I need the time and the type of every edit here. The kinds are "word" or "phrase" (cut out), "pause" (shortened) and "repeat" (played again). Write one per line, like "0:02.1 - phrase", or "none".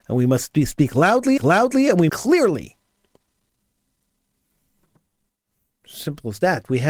0:01.4 - repeat
0:02.1 - phrase